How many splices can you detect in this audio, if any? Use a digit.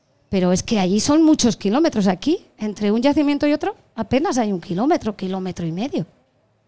0